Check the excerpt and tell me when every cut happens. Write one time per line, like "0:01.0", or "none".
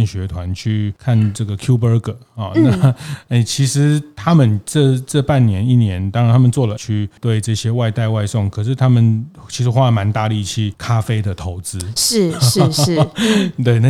0:06.8